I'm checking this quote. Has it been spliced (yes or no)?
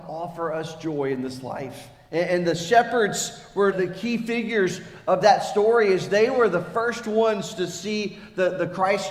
yes